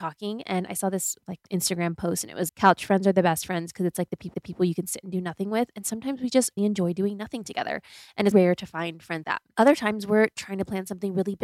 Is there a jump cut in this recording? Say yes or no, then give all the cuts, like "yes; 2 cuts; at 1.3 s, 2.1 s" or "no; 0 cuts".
yes; 6 cuts; at 1.5 s, 2.5 s, 4.3 s, 6.6 s, 8.3 s, 9.2 s